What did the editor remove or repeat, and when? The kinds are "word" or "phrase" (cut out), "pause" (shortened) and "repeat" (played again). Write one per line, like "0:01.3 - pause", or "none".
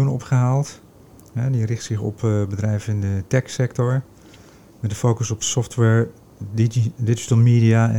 none